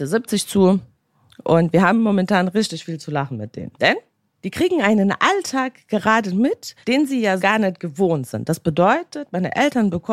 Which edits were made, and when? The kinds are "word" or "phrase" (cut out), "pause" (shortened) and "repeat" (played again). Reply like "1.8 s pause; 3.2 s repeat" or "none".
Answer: 3.7 s pause; 6.8 s pause; 7.4 s word